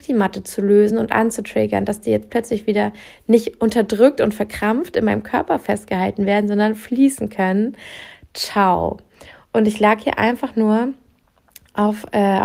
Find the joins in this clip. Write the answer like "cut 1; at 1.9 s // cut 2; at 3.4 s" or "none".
none